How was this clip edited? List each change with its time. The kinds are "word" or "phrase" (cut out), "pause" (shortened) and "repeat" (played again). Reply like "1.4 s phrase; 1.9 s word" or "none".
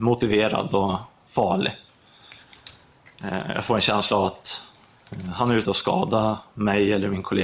5.6 s word